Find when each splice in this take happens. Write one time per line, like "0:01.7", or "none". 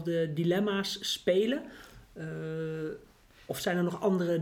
none

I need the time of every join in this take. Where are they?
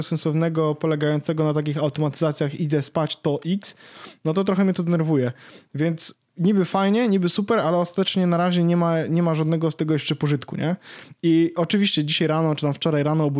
none

